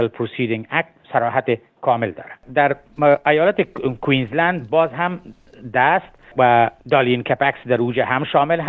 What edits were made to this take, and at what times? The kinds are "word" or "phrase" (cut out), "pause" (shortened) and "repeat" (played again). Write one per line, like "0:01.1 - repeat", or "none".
0:01.0 - pause
0:02.4 - pause
0:06.8 - pause